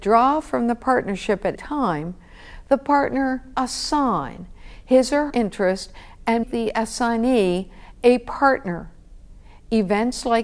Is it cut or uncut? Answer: cut